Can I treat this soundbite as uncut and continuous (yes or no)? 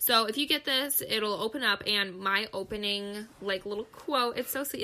yes